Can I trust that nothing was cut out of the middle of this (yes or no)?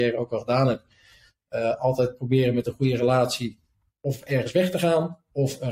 yes